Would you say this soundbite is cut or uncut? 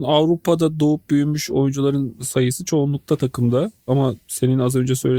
uncut